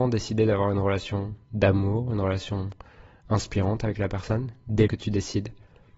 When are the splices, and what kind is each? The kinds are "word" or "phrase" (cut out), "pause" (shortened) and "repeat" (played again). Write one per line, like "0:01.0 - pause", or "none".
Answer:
0:04.9 - word